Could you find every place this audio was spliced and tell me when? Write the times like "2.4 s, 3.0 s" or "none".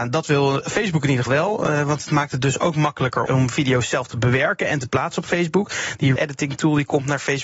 1.3 s, 3.3 s, 6.2 s